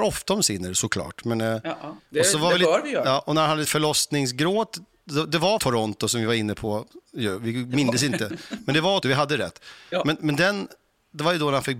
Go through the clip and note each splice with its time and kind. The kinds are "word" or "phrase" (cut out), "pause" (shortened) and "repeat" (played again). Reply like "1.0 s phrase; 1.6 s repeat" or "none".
3.6 s word; 5.6 s word; 9.0 s word

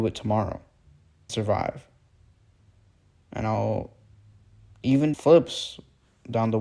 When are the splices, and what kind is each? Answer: 1.3 s word; 5.1 s phrase

